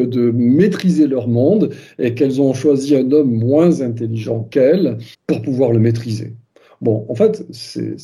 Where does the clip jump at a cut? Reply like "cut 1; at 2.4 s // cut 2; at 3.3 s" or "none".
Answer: cut 1; at 5.1 s